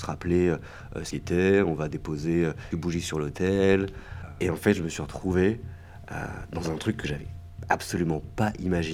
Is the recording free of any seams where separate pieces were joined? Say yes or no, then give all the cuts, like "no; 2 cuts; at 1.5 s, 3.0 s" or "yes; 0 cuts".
no; 2 cuts; at 1.1 s, 2.7 s